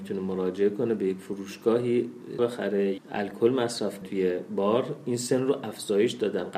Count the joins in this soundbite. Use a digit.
3